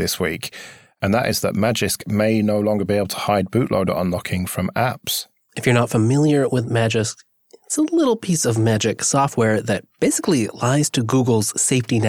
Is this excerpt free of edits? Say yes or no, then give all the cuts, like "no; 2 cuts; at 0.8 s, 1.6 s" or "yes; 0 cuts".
yes; 0 cuts